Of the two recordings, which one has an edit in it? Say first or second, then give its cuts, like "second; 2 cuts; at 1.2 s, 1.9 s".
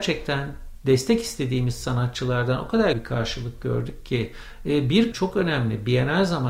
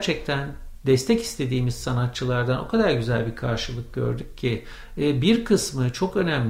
first; 2 cuts; at 2.9 s, 5.1 s